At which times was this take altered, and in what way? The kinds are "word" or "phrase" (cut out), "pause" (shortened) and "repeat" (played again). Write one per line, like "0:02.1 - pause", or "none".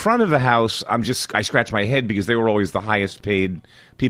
none

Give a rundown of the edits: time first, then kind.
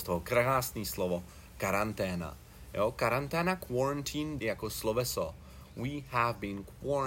0:04.4 - phrase

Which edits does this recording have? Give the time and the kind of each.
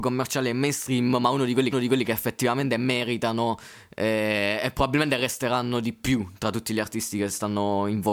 0:01.7 - repeat

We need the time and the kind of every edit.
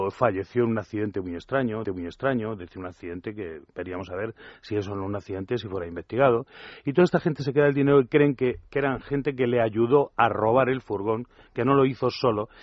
0:01.8 - repeat

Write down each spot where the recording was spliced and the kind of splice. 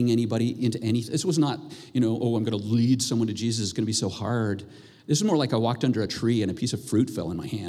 none

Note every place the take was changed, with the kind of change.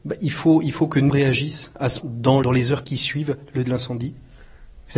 0:01.1 - word
0:02.0 - word
0:02.4 - word
0:02.8 - word
0:03.6 - word

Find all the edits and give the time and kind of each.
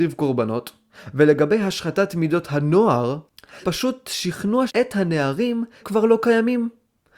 0:03.6 - word
0:04.7 - phrase
0:05.8 - word

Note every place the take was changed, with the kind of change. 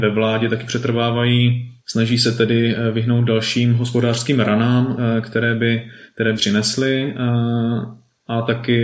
0:01.8 - pause
0:06.3 - phrase

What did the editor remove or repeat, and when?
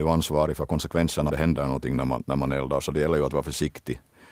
0:01.3 - phrase

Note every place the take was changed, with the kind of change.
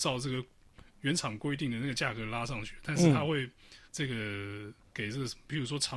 0:03.9 - pause
0:04.9 - pause

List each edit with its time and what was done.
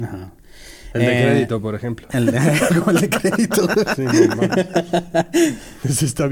none

